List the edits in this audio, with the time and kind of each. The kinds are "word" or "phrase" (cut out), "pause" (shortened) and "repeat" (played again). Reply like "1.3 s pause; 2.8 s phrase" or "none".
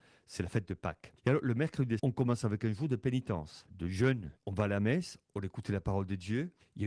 2.0 s word